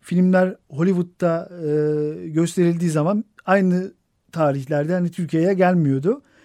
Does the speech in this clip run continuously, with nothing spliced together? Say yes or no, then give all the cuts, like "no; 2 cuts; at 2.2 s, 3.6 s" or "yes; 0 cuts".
yes; 0 cuts